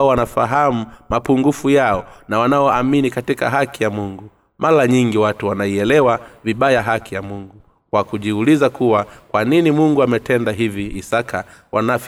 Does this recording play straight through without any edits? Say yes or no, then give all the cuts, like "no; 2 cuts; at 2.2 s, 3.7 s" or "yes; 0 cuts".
yes; 0 cuts